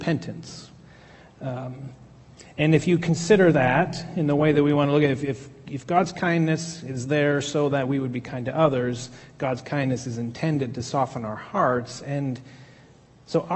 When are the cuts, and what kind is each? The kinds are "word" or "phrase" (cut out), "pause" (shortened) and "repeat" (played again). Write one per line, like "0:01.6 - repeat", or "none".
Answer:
none